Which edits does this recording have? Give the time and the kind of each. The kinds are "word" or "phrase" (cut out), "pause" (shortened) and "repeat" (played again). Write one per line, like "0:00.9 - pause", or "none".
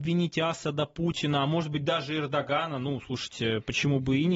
none